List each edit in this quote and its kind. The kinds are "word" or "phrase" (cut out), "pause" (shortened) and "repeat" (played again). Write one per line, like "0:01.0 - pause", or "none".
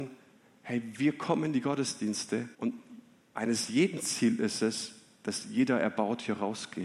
0:02.5 - pause